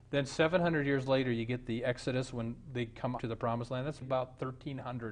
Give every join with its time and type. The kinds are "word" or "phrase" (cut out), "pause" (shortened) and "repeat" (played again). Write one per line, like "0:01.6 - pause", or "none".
0:03.2 - phrase
0:04.0 - word